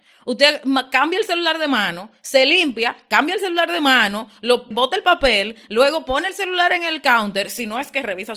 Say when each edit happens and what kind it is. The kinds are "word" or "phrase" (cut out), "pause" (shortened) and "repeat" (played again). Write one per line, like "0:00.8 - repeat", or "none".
0:04.7 - word